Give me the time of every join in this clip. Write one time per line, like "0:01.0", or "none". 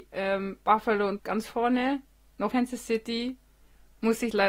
0:01.2
0:02.5